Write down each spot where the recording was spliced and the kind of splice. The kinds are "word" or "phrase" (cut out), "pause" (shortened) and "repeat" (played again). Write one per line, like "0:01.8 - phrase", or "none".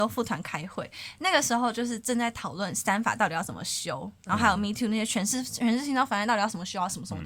none